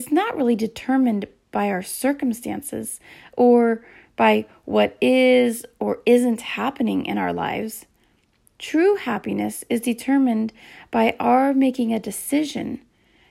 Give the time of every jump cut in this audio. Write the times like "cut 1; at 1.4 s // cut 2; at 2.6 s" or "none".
none